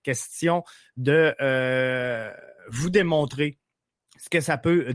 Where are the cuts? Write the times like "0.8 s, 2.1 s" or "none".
2.6 s, 3.8 s